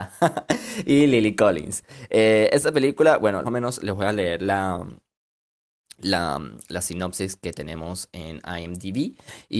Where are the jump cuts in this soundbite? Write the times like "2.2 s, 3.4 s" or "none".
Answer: 3.4 s